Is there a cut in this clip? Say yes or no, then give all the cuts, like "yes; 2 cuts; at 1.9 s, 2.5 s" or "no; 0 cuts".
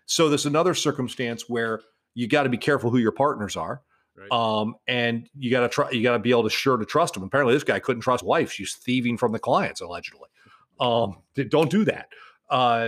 yes; 1 cut; at 8.2 s